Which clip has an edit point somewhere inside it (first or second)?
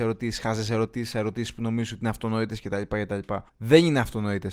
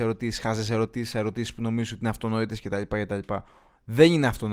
first